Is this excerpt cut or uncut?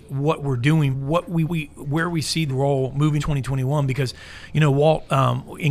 cut